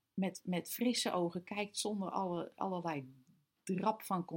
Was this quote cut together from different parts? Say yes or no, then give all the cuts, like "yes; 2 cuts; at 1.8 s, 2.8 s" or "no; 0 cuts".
no; 0 cuts